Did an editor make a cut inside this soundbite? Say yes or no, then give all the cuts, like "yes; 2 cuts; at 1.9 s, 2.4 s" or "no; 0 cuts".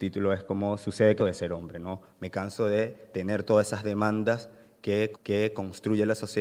yes; 2 cuts; at 1.2 s, 5.1 s